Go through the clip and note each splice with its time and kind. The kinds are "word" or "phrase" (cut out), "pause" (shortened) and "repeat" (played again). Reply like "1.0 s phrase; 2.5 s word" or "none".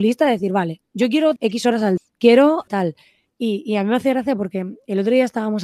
1.4 s word; 2.0 s word; 2.7 s word